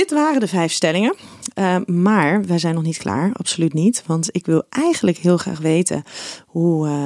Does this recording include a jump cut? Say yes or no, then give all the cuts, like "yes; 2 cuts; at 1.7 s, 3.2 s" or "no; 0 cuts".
no; 0 cuts